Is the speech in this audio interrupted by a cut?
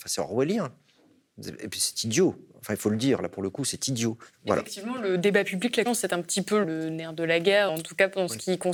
yes; 3 cuts; at 5.8 s, 6.6 s, 7.7 s

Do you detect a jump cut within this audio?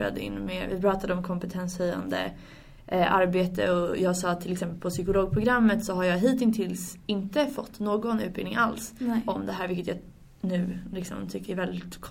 no; 0 cuts

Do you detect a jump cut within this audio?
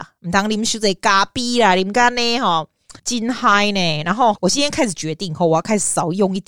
yes; 2 cuts; at 3.0 s, 4.3 s

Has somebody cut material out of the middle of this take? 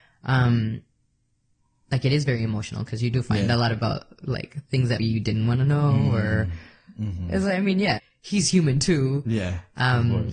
yes; 2 cuts; at 5.0 s, 8.0 s

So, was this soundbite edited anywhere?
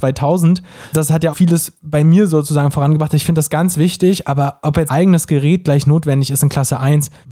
yes; 2 cuts; at 1.3 s, 4.9 s

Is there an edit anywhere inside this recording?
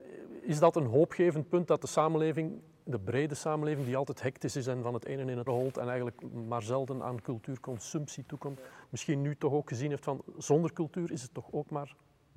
yes; 1 cut; at 5.5 s

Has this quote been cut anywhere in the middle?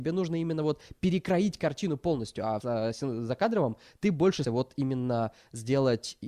yes; 2 cuts; at 2.6 s, 4.4 s

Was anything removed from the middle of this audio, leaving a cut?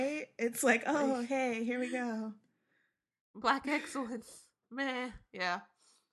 no; 0 cuts

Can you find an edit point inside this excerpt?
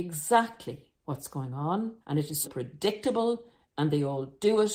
yes; 3 cuts; at 1.0 s, 2.0 s, 2.4 s

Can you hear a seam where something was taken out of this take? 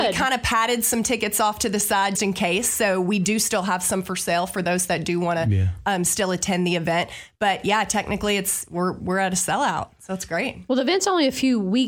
yes; 1 cut; at 2.1 s

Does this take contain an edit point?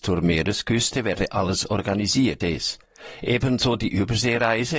yes; 1 cut; at 2.4 s

